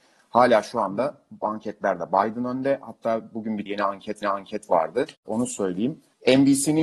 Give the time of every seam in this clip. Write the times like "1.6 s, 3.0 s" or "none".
3.7 s, 4.2 s